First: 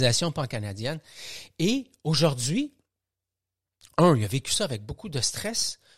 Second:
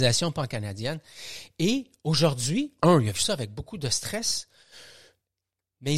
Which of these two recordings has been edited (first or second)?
second